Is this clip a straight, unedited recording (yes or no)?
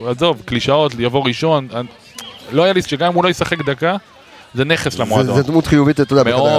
no